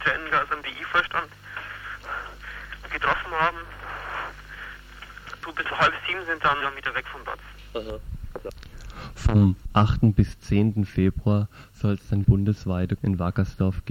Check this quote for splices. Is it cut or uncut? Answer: cut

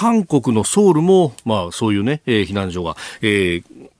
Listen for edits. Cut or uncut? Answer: uncut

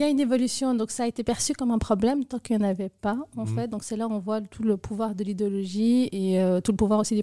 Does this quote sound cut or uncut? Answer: uncut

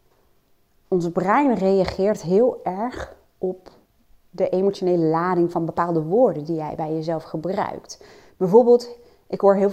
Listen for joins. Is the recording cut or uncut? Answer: uncut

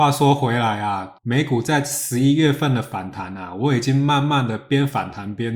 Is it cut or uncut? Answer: cut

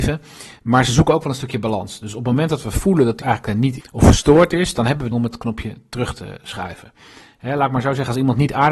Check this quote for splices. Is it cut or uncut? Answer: cut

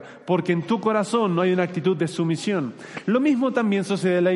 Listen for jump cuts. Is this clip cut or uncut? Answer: uncut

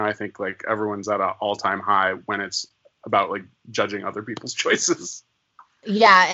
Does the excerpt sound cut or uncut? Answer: uncut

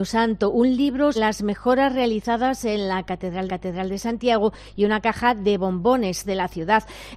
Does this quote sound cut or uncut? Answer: cut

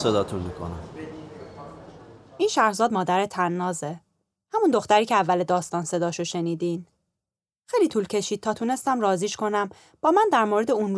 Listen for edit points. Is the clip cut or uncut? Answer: uncut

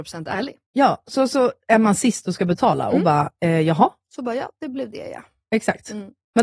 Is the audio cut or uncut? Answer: uncut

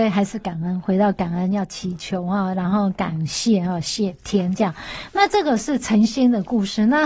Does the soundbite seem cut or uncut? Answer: uncut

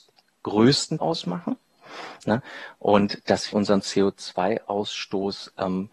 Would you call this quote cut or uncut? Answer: cut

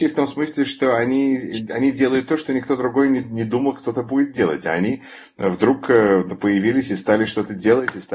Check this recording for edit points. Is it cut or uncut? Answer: uncut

